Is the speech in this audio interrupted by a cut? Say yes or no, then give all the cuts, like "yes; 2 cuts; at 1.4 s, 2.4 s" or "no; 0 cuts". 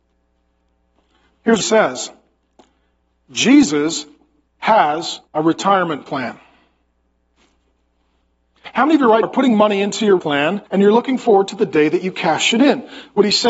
yes; 5 cuts; at 1.6 s, 5.3 s, 9.2 s, 10.2 s, 10.7 s